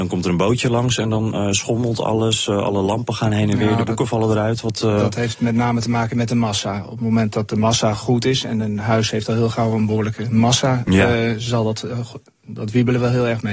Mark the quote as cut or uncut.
uncut